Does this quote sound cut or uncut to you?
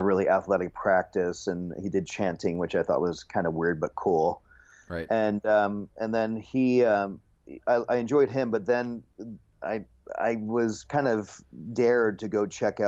uncut